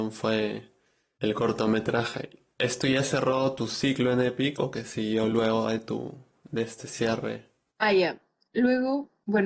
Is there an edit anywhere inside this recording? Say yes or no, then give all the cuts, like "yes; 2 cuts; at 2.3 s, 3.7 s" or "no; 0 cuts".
no; 0 cuts